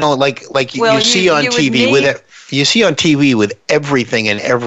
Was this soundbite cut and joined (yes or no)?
no